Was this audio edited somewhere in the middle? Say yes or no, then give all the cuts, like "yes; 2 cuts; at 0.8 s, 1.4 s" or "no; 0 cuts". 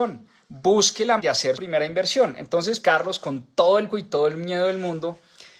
yes; 4 cuts; at 1.2 s, 1.5 s, 2.8 s, 3.9 s